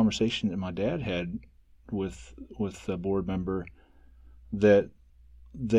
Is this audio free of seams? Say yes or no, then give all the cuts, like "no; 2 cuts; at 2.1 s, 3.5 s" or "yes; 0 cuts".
yes; 0 cuts